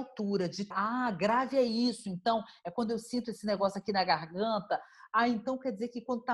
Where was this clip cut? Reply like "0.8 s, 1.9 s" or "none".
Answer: none